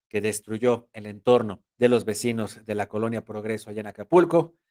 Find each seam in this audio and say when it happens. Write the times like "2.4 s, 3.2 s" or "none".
1.7 s